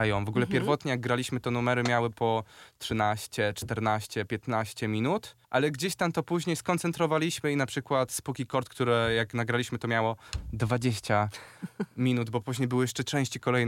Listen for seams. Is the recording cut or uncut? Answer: cut